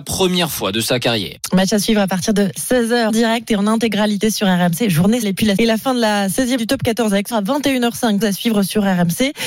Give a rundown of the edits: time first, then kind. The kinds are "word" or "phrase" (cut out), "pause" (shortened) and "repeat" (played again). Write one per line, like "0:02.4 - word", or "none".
0:03.1 - word
0:05.2 - word
0:05.6 - word
0:06.6 - word
0:07.3 - word
0:08.2 - word

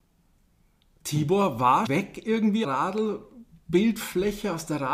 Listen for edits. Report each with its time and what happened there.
0:01.9 - word
0:02.6 - phrase

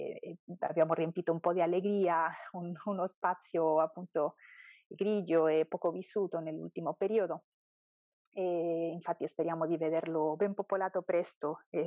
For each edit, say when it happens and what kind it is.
none

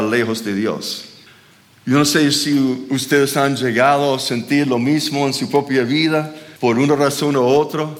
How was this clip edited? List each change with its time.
0:01.3 - pause
0:06.6 - pause

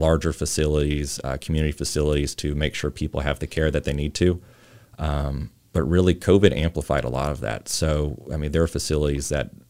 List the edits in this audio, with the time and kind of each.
none

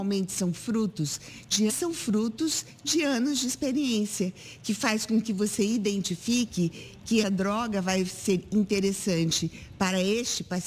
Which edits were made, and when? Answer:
0:01.7 - phrase
0:07.2 - word

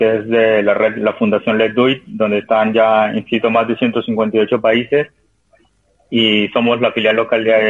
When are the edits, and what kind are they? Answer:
none

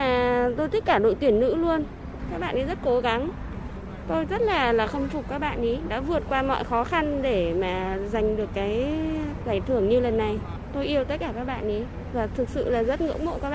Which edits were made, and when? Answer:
none

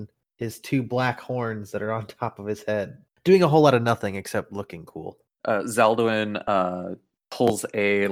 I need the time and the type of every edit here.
none

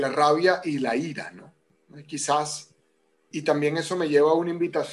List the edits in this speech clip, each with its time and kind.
0:03.3 - word

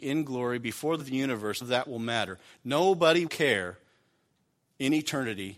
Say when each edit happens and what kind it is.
0:01.0 - word
0:01.6 - word
0:03.3 - word

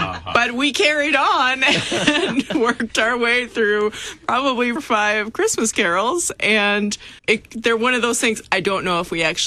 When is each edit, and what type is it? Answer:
0:04.8 - word
0:07.2 - pause

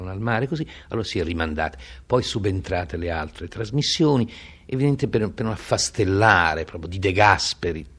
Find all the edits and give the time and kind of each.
none

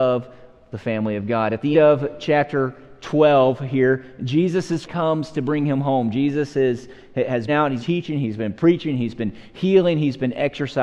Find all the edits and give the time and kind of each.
0:01.7 - word
0:04.8 - word
0:07.5 - word
0:07.8 - word

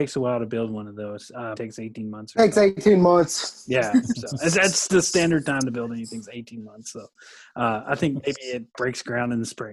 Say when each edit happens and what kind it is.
0:01.6 - word

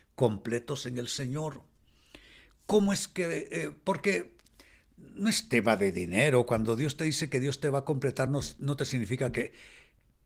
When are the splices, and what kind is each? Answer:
none

